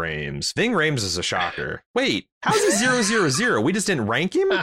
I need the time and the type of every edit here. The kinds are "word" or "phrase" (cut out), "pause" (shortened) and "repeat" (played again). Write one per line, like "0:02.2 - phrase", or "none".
0:01.9 - pause